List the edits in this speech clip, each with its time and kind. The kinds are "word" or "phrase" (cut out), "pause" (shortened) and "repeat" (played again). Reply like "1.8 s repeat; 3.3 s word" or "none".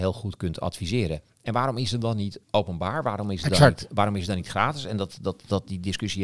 2.4 s pause